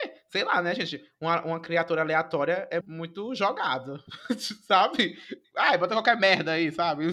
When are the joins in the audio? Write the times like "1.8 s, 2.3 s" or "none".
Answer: 2.8 s